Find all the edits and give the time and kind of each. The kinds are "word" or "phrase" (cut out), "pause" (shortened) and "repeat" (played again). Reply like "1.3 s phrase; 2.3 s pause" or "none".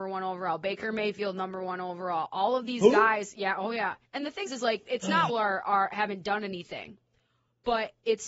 4.5 s word; 5.3 s phrase

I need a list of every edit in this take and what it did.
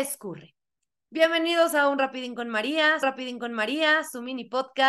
3.0 s repeat

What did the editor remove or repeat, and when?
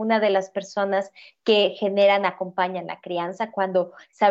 none

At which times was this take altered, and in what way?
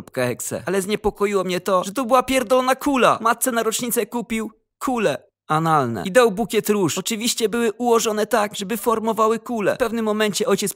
none

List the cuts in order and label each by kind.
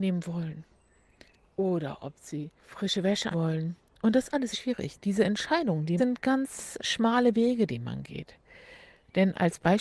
2.6 s pause; 3.3 s word; 4.5 s phrase; 6.0 s phrase; 6.8 s word

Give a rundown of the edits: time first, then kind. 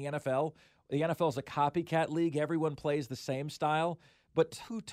none

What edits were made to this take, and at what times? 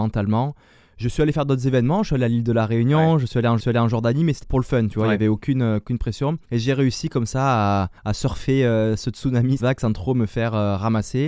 3.6 s repeat; 4.4 s word; 6.4 s pause; 8.0 s pause; 9.6 s word

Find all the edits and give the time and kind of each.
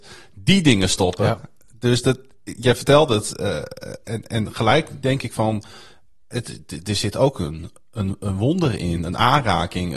none

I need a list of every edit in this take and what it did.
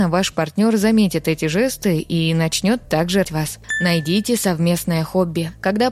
3.2 s word

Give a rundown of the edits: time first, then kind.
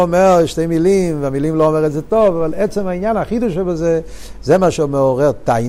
none

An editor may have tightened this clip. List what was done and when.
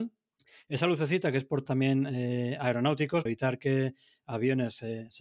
1.7 s word; 3.3 s word

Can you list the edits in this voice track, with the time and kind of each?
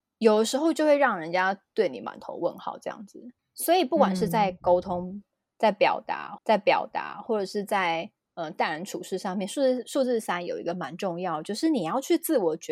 3.4 s pause; 6.4 s repeat

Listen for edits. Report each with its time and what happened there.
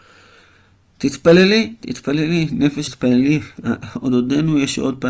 2.9 s word

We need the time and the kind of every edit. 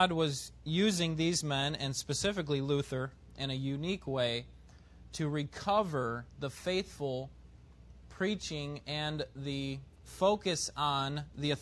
none

